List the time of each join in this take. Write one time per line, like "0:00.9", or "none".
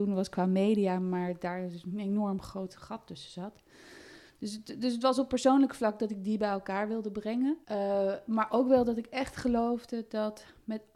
0:07.6

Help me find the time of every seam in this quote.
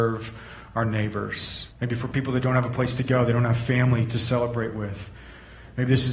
0:01.7

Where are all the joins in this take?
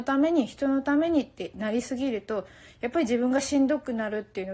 none

